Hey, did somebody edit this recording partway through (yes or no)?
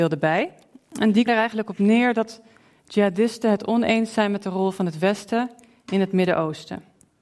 yes